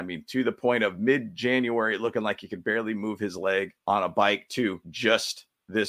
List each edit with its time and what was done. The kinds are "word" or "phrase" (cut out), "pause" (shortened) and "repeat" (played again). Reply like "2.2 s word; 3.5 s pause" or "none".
3.8 s pause; 4.8 s pause